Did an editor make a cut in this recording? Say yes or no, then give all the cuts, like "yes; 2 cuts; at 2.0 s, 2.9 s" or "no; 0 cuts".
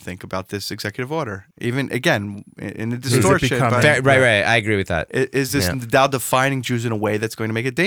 yes; 1 cut; at 1.5 s